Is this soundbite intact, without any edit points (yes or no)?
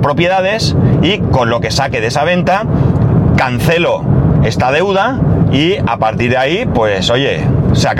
yes